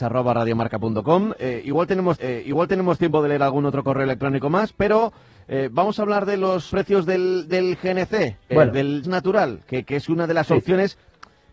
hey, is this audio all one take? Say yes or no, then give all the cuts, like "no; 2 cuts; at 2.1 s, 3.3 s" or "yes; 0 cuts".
no; 4 cuts; at 2.2 s, 6.7 s, 8.5 s, 9.0 s